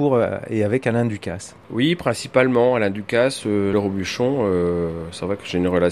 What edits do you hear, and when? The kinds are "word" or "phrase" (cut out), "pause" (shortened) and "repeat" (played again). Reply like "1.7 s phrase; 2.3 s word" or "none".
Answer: 1.6 s pause; 3.7 s word